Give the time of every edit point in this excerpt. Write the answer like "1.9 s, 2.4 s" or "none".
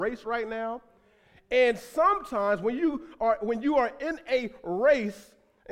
none